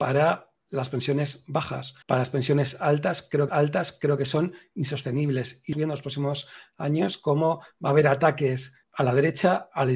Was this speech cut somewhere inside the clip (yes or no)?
yes